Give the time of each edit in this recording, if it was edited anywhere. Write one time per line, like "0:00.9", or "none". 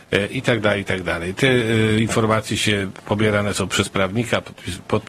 none